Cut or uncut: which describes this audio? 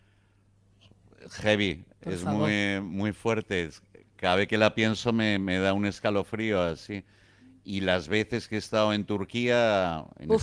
uncut